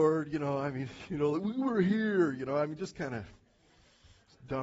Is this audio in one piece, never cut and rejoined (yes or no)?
yes